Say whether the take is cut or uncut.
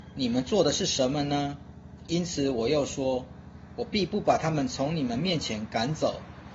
uncut